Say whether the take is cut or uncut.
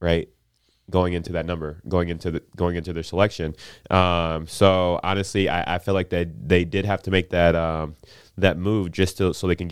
uncut